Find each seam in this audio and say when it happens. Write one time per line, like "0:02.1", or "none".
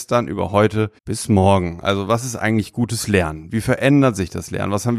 0:01.0